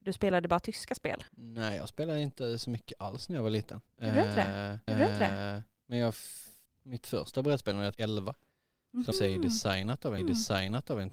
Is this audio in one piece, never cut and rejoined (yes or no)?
no